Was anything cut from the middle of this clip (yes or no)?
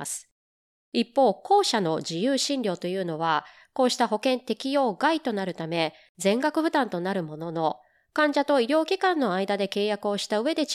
no